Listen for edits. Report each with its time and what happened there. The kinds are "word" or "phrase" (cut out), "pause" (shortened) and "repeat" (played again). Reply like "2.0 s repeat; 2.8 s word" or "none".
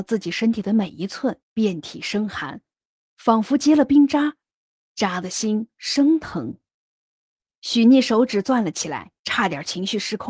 1.4 s pause; 9.2 s pause